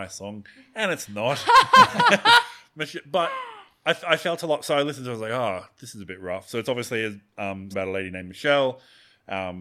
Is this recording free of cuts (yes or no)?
no